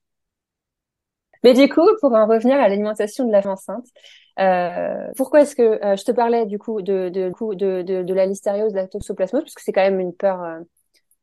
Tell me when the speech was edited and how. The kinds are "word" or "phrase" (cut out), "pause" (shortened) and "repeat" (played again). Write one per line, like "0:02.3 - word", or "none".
0:03.4 - word
0:05.1 - word
0:07.3 - repeat